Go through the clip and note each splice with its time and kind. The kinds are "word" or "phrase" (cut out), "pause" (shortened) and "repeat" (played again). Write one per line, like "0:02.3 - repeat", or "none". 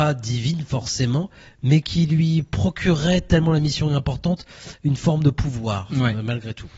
none